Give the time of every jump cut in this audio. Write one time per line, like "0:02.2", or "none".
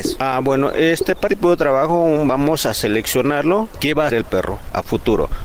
0:01.3
0:04.1